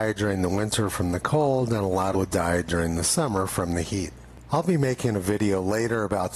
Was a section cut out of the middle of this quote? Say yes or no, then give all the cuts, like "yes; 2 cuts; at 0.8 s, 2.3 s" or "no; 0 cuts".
yes; 1 cut; at 2.1 s